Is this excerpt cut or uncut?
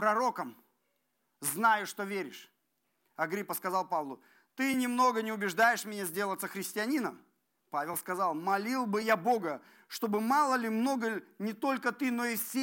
uncut